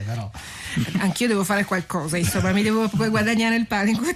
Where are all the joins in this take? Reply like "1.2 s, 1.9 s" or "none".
none